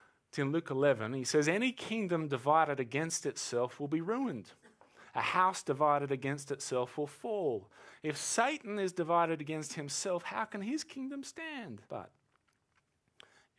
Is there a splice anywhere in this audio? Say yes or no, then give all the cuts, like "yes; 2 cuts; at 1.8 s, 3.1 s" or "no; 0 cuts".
yes; 1 cut; at 11.9 s